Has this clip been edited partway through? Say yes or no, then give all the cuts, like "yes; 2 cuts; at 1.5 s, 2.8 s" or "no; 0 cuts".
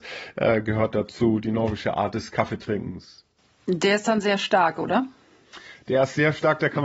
no; 0 cuts